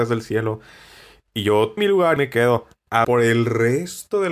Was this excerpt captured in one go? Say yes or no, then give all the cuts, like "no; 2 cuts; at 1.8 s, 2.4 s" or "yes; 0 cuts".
no; 3 cuts; at 1.8 s, 2.2 s, 3.0 s